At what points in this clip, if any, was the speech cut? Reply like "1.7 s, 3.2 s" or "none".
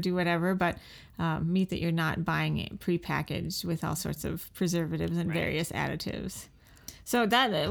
none